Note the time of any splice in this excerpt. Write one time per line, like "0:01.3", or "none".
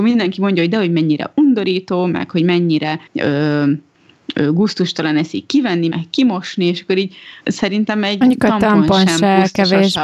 0:03.1
0:05.9
0:07.4